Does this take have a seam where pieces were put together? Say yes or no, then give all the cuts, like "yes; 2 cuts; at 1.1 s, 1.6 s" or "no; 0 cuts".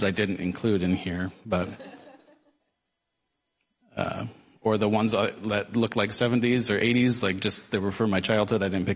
no; 0 cuts